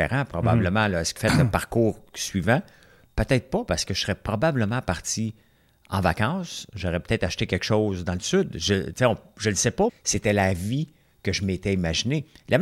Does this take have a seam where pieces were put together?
yes; 2 cuts; at 1.2 s, 9.9 s

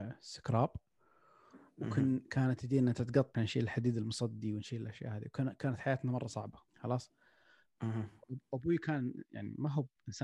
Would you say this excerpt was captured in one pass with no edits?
no; 2 cuts; at 3.3 s, 6.7 s

